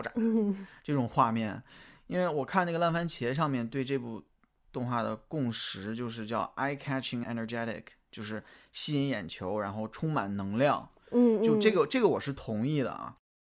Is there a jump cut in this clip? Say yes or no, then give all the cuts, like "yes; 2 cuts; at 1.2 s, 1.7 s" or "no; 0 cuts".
yes; 1 cut; at 7.2 s